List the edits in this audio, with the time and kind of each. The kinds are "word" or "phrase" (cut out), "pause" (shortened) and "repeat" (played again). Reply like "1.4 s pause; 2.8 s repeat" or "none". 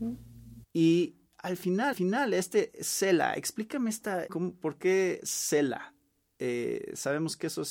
1.3 s pause; 1.9 s repeat; 4.3 s word